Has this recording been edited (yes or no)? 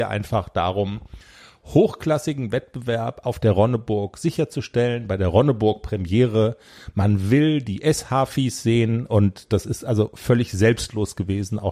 no